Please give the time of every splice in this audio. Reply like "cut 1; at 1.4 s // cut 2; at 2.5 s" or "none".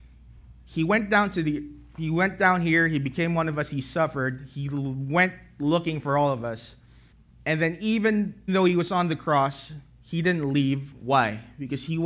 cut 1; at 7.1 s // cut 2; at 8.5 s